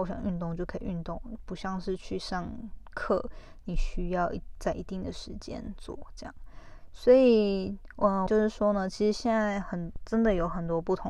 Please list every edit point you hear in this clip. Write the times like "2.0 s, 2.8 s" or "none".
8.3 s